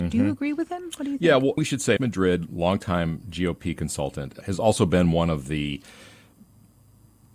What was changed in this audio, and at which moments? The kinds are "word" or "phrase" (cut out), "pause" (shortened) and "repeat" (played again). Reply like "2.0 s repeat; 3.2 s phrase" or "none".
1.6 s word; 2.0 s word; 4.4 s word